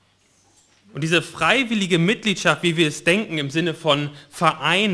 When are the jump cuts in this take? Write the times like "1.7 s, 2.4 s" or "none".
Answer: none